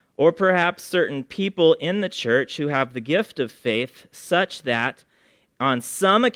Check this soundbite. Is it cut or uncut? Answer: uncut